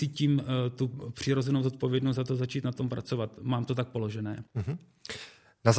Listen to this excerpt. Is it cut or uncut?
cut